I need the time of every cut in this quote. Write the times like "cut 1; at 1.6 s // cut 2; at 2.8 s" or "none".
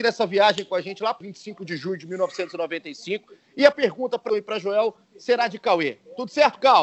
cut 1; at 1.2 s // cut 2; at 3.7 s // cut 3; at 4.3 s